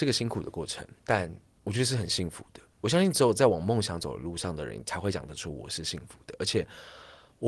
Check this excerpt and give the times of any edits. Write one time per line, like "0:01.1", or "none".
none